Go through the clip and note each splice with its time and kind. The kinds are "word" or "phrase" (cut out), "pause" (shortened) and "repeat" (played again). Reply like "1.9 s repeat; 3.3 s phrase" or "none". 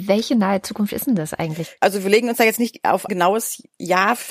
3.1 s word